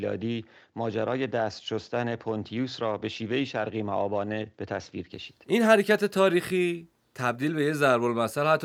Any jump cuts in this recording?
no; 0 cuts

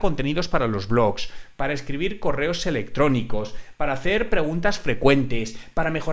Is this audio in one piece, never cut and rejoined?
yes; 0 cuts

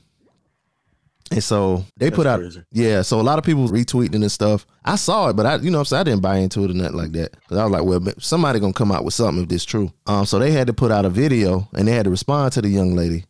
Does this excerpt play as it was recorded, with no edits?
no; 5 cuts; at 1.9 s, 3.7 s, 4.7 s, 7.4 s, 10.0 s

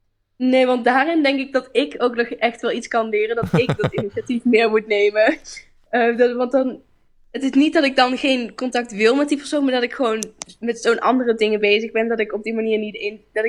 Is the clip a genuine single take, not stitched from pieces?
yes; 0 cuts

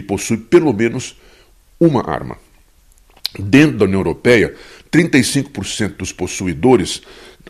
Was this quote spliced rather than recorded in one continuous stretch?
no; 0 cuts

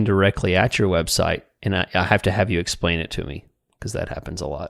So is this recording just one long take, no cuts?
yes; 0 cuts

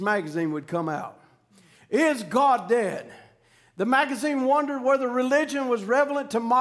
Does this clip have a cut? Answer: no; 0 cuts

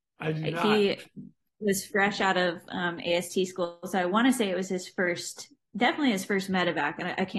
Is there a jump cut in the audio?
no; 0 cuts

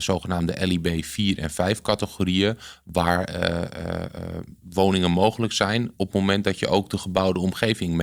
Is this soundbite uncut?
yes; 0 cuts

